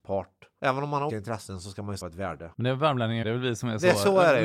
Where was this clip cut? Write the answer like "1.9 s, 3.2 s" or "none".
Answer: 1.1 s, 2.0 s, 3.2 s